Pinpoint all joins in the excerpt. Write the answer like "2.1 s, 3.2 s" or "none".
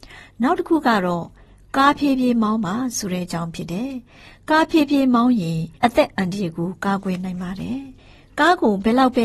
5.8 s, 8.0 s